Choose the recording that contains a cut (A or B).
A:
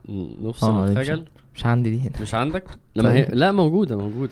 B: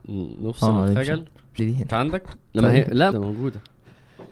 B